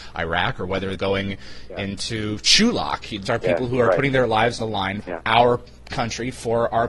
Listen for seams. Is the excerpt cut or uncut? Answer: cut